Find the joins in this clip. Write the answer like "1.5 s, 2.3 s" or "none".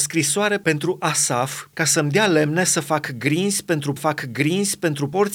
1.7 s, 4.0 s